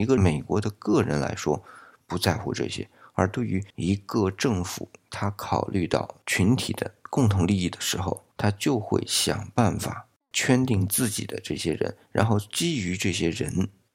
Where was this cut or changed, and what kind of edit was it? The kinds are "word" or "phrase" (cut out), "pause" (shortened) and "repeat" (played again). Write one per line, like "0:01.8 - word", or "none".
0:03.7 - pause
0:08.3 - pause